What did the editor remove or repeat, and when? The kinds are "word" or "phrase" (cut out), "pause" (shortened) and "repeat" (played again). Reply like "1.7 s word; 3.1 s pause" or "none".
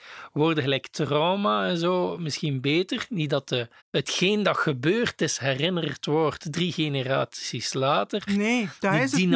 3.8 s pause; 8.3 s word